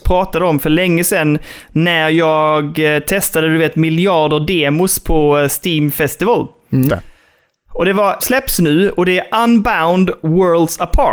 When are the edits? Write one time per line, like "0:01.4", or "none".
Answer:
0:06.9
0:08.2